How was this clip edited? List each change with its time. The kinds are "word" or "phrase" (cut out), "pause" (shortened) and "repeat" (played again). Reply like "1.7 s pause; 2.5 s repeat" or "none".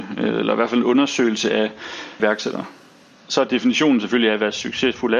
2.2 s word